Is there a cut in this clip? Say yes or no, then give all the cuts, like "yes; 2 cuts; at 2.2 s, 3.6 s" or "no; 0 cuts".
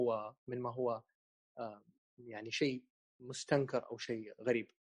no; 0 cuts